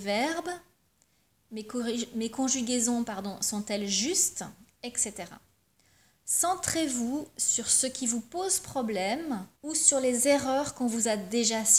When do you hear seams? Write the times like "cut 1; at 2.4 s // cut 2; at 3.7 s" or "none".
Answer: cut 1; at 9.6 s